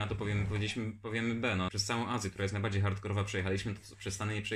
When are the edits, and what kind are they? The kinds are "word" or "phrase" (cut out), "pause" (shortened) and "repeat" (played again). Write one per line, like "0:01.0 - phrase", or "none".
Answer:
0:01.7 - phrase

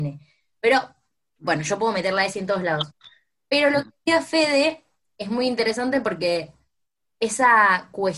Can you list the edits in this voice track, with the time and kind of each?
none

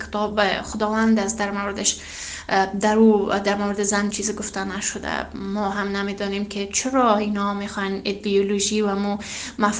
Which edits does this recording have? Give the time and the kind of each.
0:04.1 - word

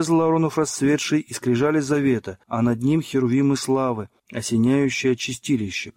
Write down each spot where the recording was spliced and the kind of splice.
0:02.4 - pause
0:04.2 - pause

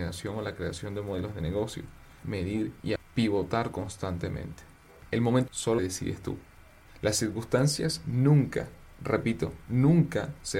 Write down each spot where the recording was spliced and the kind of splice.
0:02.2 - word
0:03.0 - word
0:05.5 - word
0:05.8 - word

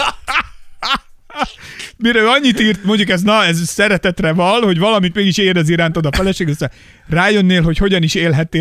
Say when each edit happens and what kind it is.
none

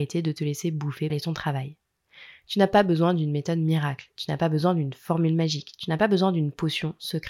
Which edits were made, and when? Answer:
0:01.1 - phrase

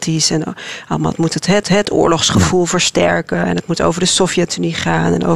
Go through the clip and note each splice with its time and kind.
0:01.6 - repeat

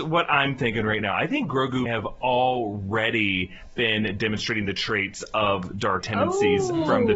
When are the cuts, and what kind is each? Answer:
0:01.9 - word
0:06.0 - word

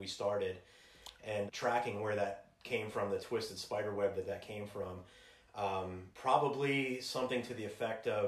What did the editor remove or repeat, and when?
0:01.5 - word
0:06.1 - pause

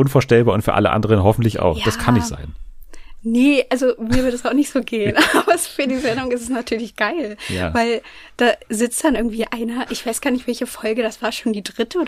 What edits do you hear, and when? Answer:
none

